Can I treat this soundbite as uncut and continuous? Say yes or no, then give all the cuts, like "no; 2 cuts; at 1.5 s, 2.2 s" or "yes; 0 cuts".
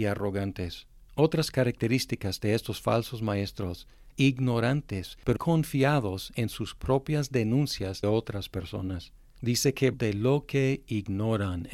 no; 4 cuts; at 4.1 s, 5.4 s, 8.0 s, 9.9 s